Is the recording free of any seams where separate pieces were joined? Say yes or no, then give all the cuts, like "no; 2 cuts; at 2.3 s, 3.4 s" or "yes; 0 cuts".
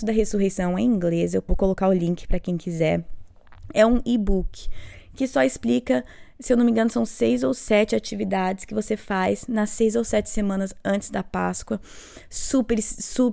no; 1 cut; at 1.5 s